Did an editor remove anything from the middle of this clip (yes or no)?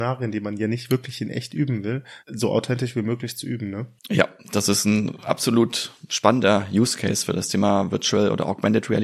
yes